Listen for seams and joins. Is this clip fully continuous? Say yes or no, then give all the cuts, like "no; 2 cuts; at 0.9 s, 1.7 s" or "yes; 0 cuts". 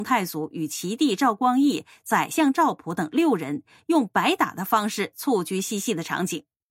yes; 0 cuts